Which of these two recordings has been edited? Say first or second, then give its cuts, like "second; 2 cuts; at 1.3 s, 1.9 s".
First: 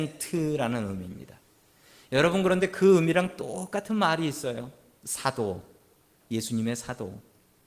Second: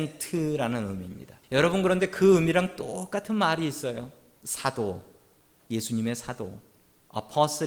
second; 1 cut; at 1.4 s